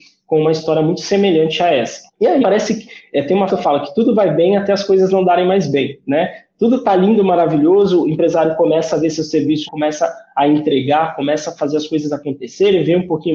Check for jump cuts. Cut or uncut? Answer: cut